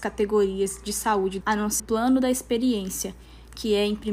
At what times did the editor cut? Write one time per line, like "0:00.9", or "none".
0:01.4
0:01.8